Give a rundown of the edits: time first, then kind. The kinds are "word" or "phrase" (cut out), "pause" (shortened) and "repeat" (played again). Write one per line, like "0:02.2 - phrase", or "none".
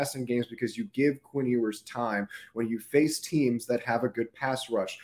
none